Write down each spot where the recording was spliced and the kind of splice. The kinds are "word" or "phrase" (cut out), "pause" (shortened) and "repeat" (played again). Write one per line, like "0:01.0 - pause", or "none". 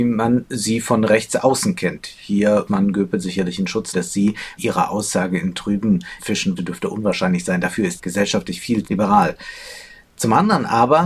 0:02.7 - word
0:03.9 - word
0:04.6 - word
0:06.2 - word
0:06.6 - word
0:08.0 - word
0:08.8 - word